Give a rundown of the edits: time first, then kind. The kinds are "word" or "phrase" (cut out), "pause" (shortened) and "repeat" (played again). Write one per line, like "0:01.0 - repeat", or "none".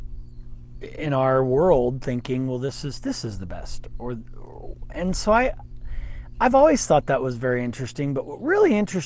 none